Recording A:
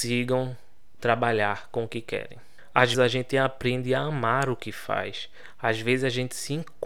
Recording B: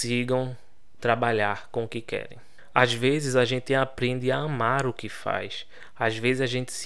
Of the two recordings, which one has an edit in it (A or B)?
A